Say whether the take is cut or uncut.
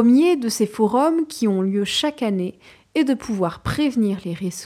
uncut